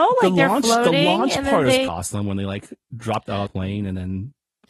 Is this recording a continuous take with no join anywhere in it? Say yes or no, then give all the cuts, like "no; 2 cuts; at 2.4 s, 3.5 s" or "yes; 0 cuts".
no; 2 cuts; at 1.9 s, 3.5 s